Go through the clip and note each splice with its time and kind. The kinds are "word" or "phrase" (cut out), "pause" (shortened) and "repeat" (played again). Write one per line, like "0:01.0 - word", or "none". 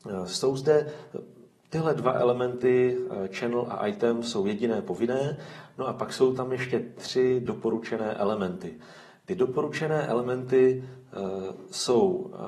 none